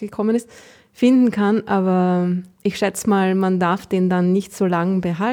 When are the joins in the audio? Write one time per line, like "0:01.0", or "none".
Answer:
none